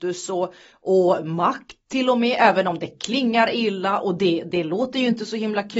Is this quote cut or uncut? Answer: uncut